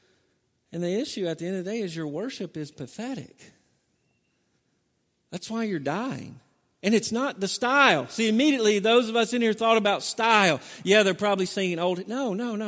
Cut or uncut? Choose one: uncut